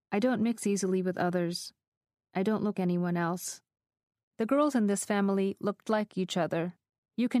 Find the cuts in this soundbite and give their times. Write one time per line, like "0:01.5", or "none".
0:02.7
0:03.8
0:05.8